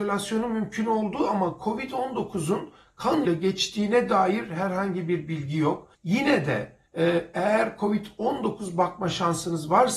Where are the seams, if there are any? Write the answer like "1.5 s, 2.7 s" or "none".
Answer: 3.2 s, 5.9 s, 6.9 s